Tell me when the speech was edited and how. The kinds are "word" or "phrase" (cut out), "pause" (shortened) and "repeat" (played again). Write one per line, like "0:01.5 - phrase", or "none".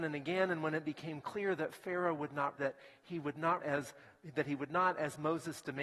0:02.5 - word
0:03.6 - word